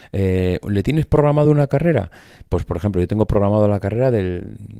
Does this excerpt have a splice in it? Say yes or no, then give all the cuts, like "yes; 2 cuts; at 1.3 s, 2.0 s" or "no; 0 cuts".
no; 0 cuts